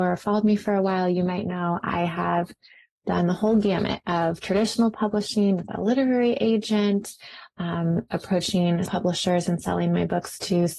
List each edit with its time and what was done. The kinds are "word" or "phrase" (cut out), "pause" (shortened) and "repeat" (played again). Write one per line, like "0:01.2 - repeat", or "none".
0:08.9 - word